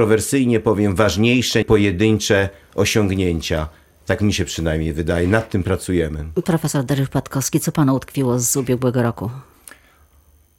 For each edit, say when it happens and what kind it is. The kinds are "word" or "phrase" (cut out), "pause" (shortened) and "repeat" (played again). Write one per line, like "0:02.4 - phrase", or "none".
0:01.6 - phrase